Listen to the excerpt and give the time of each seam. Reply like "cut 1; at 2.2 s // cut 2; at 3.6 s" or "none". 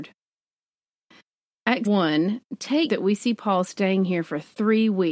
cut 1; at 1.9 s // cut 2; at 2.9 s